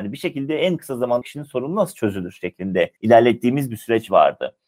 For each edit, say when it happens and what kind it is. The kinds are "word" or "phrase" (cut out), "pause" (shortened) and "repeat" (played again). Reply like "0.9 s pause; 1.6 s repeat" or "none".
1.2 s word; 3.0 s pause

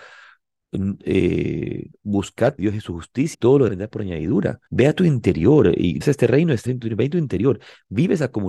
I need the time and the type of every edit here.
2.6 s phrase; 3.3 s word; 3.7 s word; 4.7 s pause; 6.0 s word; 6.7 s word

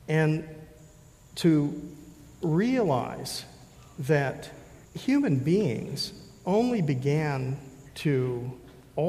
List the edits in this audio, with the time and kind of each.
2.3 s pause; 4.8 s pause

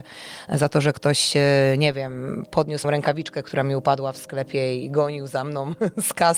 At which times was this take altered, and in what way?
2.8 s word

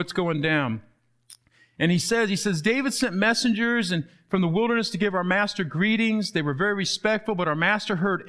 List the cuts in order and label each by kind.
none

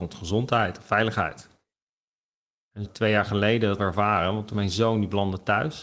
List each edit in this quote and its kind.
2.8 s word; 3.8 s word; 4.5 s word

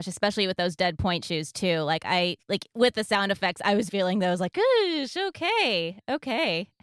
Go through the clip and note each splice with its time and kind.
3.9 s word

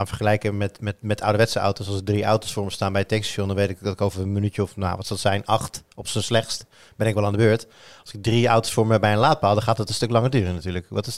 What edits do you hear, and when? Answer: none

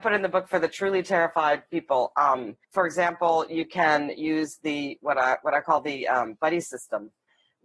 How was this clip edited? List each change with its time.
2.6 s pause

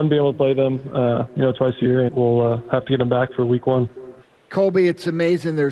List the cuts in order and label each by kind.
2.1 s word; 4.2 s pause

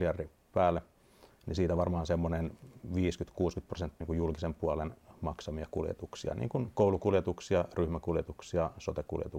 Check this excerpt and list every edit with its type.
4.0 s word

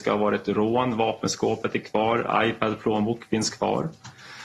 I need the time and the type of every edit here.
none

